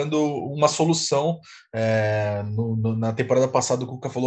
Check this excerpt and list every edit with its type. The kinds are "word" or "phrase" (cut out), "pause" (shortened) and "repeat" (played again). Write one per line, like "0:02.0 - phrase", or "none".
none